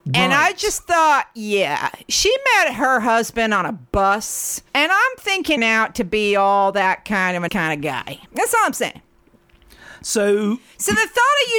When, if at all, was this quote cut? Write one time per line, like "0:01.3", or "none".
0:04.7
0:05.6
0:07.5
0:08.3